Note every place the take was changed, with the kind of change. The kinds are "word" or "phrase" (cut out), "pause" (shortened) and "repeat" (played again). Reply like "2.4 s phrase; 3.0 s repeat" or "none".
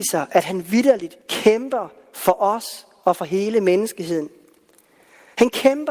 1.2 s pause